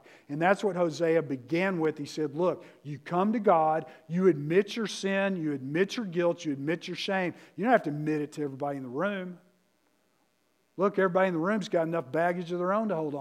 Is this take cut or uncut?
uncut